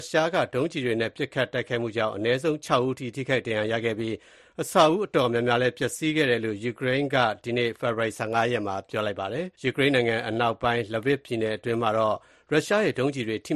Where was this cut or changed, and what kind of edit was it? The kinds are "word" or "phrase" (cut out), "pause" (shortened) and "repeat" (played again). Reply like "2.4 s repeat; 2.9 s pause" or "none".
9.5 s pause